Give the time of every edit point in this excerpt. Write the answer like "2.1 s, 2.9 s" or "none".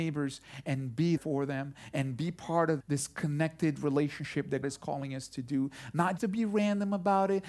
1.2 s, 2.8 s, 4.6 s, 6.2 s